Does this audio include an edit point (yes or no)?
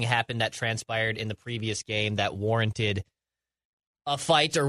no